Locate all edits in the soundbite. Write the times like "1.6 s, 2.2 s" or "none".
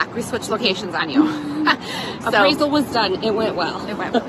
2.2 s

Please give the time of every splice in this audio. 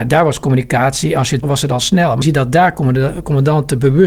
1.4 s, 2.2 s

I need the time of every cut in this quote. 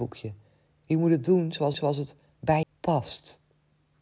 1.7 s, 2.6 s

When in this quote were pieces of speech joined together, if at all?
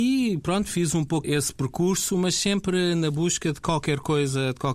1.2 s

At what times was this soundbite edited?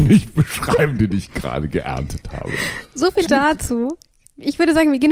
3.3 s

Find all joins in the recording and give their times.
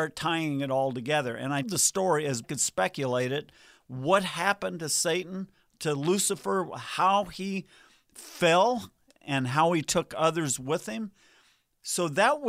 1.6 s, 2.4 s

